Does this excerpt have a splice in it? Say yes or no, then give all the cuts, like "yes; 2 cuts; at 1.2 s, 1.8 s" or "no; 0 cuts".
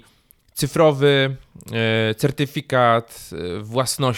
no; 0 cuts